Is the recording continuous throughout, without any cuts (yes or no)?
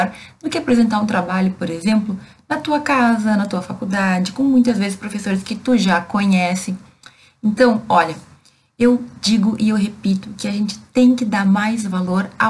yes